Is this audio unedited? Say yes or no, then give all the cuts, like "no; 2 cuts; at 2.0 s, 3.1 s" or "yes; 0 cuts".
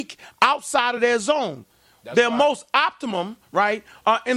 yes; 0 cuts